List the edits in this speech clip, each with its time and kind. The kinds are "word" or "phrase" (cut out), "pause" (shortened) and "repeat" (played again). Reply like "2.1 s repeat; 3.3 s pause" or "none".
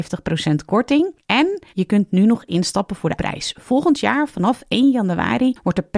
1.7 s pause; 3.2 s word